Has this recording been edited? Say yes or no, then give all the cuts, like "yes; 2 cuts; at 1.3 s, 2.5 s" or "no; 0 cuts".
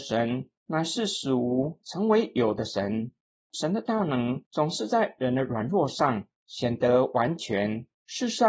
no; 0 cuts